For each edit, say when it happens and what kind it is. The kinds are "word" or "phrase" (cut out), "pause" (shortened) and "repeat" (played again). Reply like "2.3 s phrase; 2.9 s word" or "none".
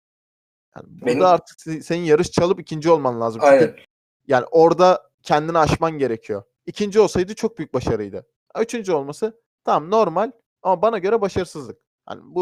none

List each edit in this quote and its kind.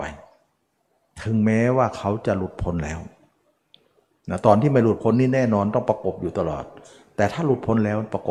none

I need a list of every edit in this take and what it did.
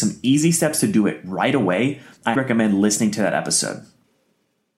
2.4 s word

